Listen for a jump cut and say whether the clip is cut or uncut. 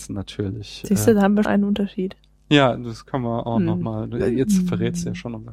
cut